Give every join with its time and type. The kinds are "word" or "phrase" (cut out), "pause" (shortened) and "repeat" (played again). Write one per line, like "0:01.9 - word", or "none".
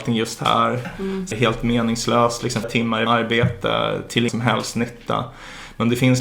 0:01.3 - word
0:02.6 - word
0:03.1 - word
0:04.3 - word